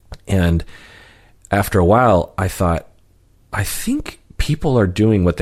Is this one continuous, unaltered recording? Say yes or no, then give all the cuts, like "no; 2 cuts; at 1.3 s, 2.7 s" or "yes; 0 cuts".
yes; 0 cuts